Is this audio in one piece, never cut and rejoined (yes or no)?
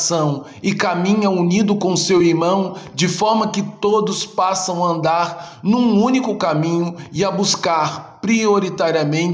yes